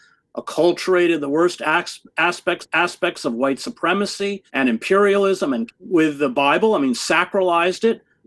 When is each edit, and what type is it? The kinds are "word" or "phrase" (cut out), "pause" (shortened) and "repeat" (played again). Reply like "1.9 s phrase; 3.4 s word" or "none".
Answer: 2.6 s repeat; 4.5 s pause; 5.7 s word